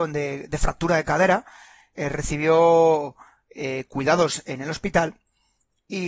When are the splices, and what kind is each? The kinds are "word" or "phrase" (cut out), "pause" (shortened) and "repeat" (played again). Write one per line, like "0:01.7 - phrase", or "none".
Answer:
none